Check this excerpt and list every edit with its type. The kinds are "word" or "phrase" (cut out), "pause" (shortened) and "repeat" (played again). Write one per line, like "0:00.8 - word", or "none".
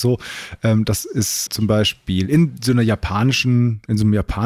0:01.5 - word